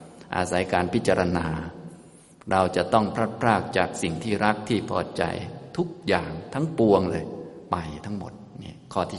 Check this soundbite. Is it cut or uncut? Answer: uncut